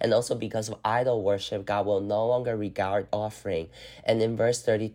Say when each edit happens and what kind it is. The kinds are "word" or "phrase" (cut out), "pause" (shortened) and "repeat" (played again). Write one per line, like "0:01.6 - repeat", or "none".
0:03.1 - word